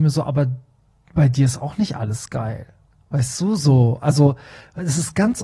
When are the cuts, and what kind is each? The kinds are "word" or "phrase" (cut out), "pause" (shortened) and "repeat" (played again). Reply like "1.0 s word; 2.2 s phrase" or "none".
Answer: none